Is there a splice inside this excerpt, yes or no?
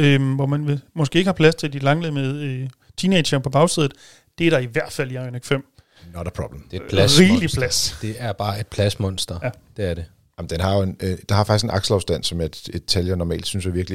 no